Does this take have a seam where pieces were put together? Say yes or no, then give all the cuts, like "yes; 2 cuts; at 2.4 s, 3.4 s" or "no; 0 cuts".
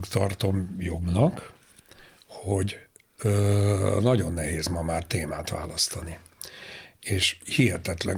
no; 0 cuts